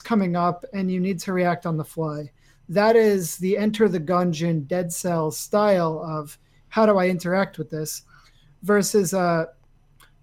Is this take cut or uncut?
uncut